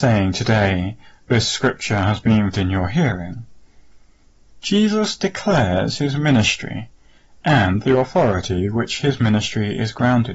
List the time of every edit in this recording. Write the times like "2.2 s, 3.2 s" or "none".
2.5 s